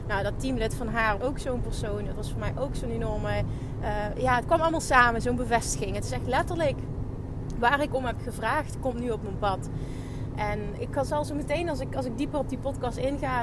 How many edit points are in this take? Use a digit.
2